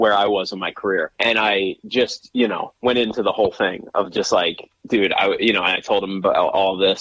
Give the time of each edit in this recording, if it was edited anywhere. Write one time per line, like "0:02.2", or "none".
0:01.2
0:02.8